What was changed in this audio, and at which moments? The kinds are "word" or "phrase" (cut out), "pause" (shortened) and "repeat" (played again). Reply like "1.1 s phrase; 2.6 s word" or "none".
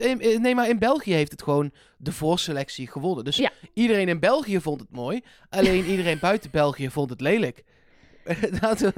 none